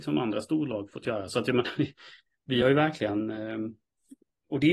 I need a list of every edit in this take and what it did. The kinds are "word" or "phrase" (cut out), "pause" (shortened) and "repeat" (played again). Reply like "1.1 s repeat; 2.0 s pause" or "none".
none